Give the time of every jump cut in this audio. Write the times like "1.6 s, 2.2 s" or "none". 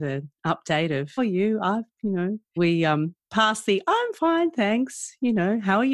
1.2 s, 2.6 s